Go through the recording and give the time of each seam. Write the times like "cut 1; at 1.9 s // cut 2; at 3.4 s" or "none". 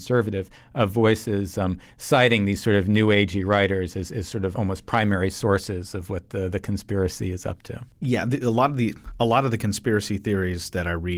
cut 1; at 4.5 s